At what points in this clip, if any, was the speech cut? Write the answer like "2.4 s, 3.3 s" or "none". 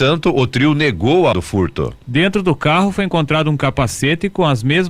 1.3 s